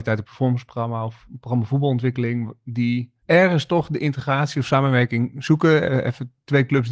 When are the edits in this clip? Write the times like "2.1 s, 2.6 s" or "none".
3.2 s